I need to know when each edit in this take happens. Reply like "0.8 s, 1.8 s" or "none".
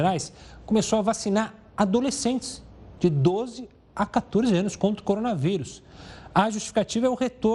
none